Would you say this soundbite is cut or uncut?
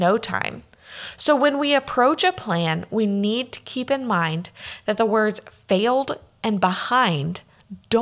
uncut